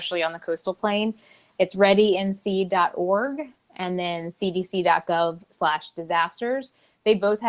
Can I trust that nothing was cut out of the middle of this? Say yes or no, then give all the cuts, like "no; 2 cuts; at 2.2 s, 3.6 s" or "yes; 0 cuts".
yes; 0 cuts